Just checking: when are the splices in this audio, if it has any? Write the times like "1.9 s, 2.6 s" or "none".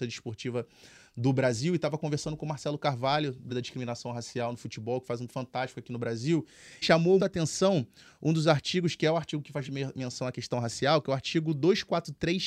3.5 s, 5.3 s, 6.8 s, 7.2 s, 9.6 s